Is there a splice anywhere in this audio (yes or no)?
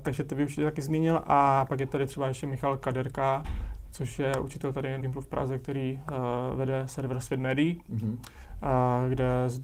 yes